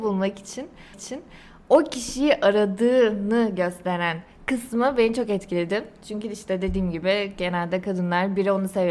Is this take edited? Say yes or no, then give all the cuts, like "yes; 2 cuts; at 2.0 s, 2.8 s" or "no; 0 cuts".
yes; 1 cut; at 0.9 s